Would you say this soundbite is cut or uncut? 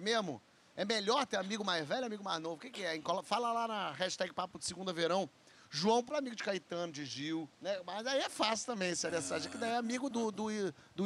cut